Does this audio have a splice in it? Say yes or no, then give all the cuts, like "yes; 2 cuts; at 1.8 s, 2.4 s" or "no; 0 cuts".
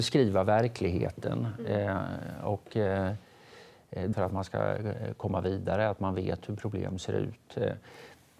yes; 1 cut; at 4.1 s